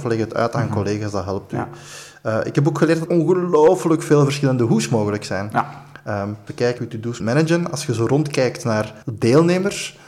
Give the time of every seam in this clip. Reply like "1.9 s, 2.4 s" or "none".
3.1 s, 6.5 s, 6.8 s, 7.2 s, 9.0 s